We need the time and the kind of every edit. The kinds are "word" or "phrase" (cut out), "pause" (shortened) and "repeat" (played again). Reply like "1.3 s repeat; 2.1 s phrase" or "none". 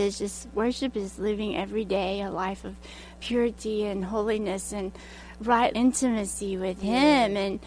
5.7 s phrase